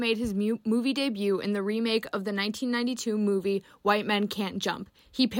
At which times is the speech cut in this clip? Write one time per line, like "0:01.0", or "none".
none